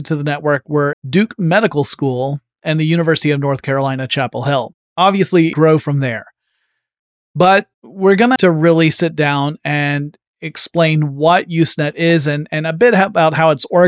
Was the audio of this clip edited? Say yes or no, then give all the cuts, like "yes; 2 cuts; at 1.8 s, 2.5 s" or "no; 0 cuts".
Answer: yes; 5 cuts; at 0.9 s, 4.8 s, 5.5 s, 7.7 s, 8.4 s